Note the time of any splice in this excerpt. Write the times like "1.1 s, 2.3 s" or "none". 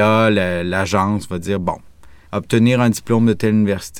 2.3 s